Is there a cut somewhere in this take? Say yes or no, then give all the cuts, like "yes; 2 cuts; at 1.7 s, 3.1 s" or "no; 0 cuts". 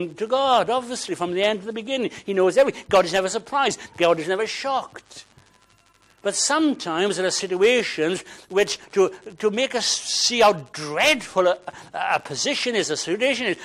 no; 0 cuts